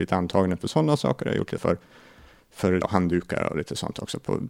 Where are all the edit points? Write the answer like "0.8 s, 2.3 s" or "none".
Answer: 1.6 s, 2.8 s